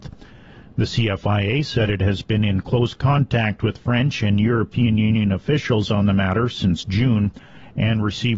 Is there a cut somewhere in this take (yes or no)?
no